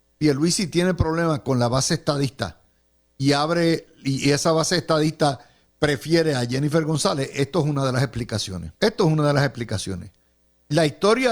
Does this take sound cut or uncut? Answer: cut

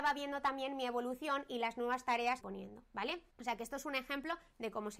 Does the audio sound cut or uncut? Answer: cut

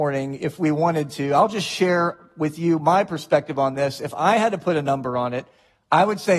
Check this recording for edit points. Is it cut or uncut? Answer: uncut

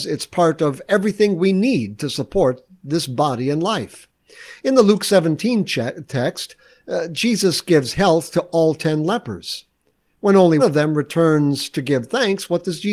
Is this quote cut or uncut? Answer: cut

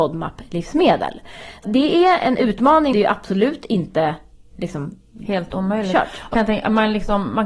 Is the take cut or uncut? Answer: cut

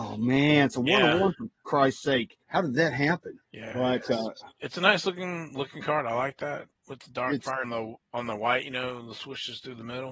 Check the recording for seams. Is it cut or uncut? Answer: cut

